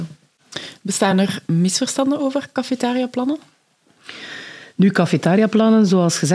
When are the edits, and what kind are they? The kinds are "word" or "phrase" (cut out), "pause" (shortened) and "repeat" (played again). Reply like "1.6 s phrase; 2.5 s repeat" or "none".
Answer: none